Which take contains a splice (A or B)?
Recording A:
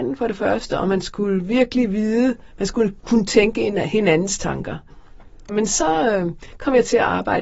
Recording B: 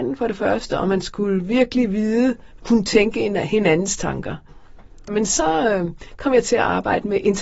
B